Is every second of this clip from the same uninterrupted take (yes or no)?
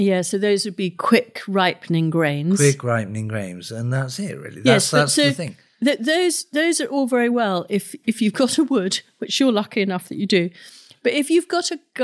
yes